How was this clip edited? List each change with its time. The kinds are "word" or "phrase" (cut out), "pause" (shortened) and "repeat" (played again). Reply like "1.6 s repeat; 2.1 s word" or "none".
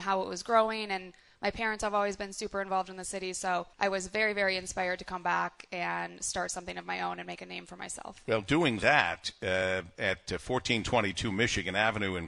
3.7 s pause